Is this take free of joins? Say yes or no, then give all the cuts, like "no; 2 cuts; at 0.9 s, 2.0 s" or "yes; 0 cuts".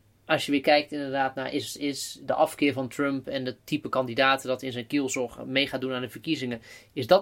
yes; 0 cuts